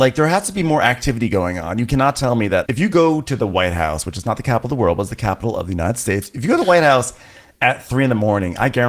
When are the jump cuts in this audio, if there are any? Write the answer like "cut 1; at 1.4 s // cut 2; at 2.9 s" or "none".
cut 1; at 2.6 s